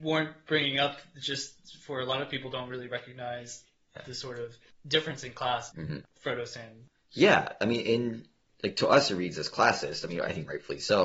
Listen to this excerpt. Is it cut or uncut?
cut